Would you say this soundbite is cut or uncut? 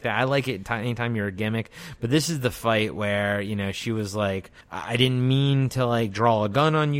cut